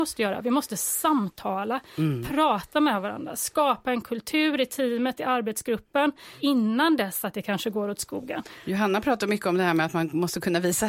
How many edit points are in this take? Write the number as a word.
zero